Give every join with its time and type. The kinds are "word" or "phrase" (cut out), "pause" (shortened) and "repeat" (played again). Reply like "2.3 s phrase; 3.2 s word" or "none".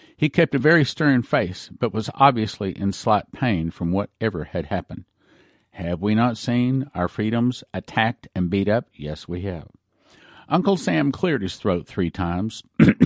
none